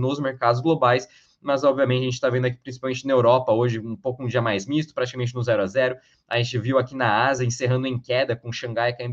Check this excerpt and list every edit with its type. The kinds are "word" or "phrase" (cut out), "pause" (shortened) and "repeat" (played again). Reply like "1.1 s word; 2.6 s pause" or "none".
none